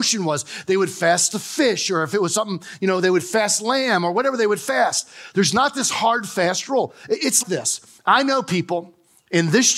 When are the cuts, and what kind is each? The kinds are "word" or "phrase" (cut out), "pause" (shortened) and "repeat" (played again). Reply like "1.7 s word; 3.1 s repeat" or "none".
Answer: 7.4 s word